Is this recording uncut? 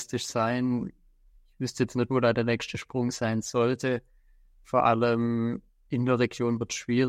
yes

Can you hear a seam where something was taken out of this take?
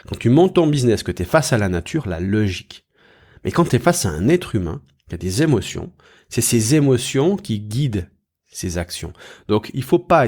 no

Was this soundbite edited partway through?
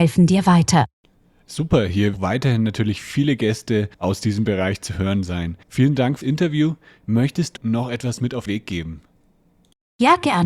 yes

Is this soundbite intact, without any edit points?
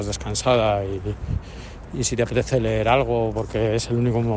yes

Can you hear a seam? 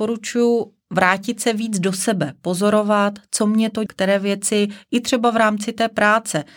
yes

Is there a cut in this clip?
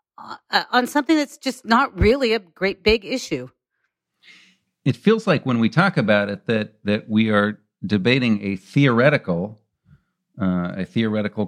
no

